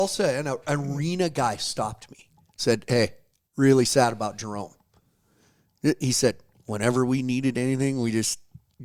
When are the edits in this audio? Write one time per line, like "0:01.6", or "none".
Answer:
none